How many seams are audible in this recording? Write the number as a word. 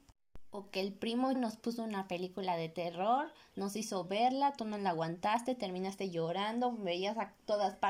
one